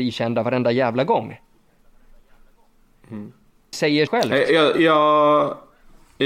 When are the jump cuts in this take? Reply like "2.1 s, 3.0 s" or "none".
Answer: 3.7 s, 4.1 s